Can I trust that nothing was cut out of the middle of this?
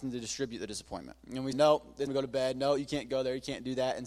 no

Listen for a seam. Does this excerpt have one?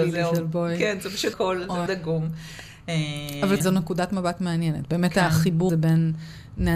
yes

